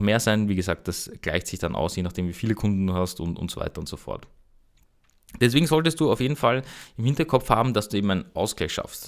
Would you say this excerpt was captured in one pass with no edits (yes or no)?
yes